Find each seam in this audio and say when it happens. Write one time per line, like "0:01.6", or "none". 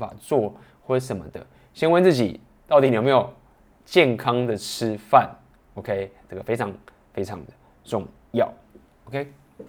none